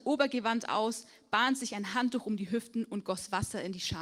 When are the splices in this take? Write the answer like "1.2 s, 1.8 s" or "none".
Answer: none

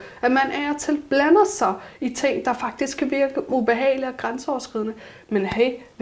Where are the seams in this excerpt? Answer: 3.5 s

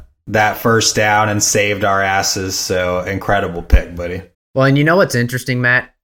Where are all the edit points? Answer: 4.3 s

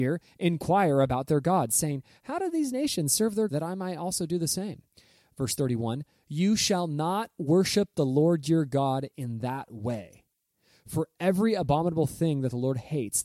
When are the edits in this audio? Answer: 3.5 s

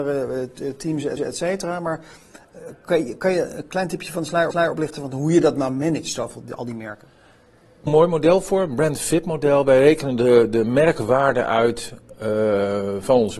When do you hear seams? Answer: 1.2 s, 4.5 s, 7.9 s

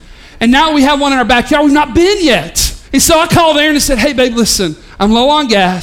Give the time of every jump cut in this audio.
2.8 s

